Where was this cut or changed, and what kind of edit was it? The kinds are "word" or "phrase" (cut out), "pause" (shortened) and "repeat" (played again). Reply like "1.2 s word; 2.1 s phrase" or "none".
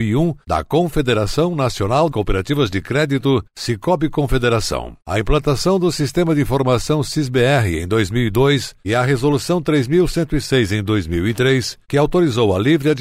2.1 s word; 3.5 s pause